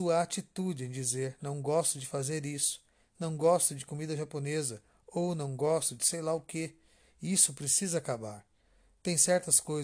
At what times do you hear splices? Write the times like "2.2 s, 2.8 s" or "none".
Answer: none